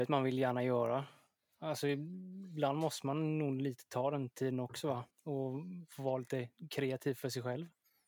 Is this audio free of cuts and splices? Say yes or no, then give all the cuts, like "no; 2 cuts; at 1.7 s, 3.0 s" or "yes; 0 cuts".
no; 1 cut; at 5.1 s